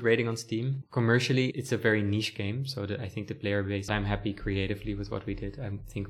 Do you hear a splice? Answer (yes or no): yes